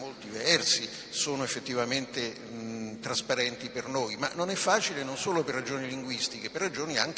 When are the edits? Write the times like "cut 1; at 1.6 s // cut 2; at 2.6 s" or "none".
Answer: none